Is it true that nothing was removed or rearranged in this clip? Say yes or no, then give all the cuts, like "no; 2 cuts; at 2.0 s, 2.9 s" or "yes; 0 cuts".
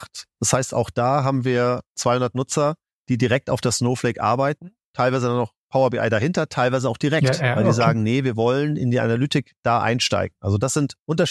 yes; 0 cuts